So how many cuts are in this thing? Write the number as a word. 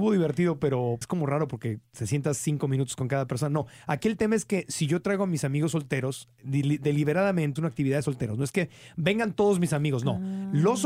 two